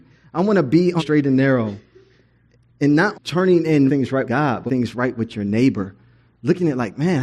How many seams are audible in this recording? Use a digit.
5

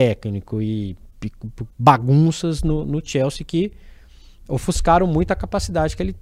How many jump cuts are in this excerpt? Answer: 1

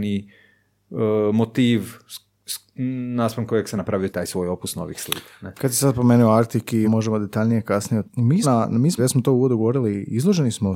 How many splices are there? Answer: 6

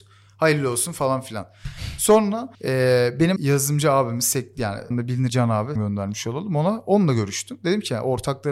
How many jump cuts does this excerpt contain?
5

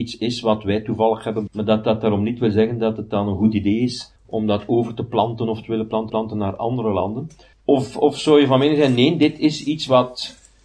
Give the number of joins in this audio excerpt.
4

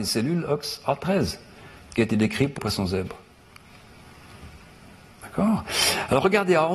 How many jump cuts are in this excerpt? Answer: 2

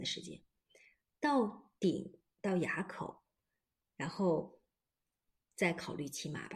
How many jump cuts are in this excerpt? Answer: 0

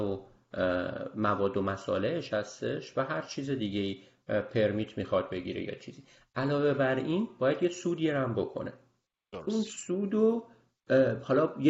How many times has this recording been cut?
0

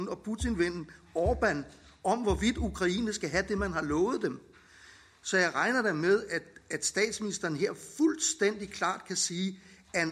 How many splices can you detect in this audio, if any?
0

